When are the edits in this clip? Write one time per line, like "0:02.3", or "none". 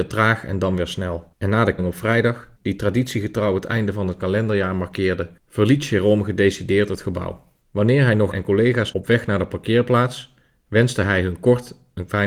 0:01.3
0:01.8
0:02.6
0:05.4
0:07.6
0:08.3
0:08.9